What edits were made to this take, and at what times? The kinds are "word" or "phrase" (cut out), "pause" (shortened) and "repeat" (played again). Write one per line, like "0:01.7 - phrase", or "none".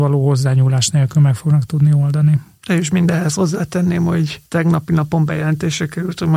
none

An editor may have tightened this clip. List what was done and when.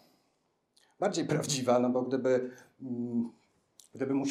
none

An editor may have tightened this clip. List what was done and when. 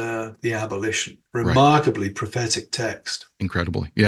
0:01.3 - pause

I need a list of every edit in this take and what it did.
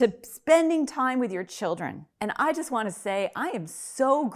0:02.1 - pause

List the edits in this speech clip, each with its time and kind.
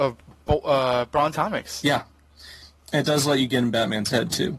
0:01.3 - word

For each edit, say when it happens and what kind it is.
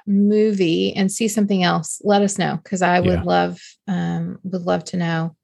none

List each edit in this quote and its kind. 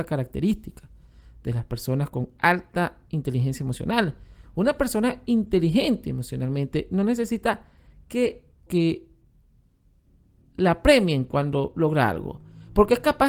0:08.7 - phrase

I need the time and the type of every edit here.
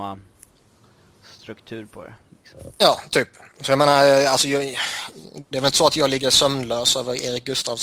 none

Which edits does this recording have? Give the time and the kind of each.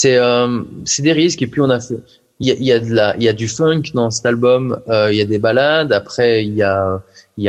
0:02.4 - word

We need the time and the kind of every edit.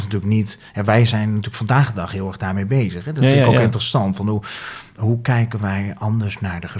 none

